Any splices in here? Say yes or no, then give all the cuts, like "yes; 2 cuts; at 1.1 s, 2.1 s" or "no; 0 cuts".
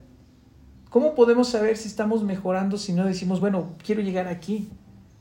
no; 0 cuts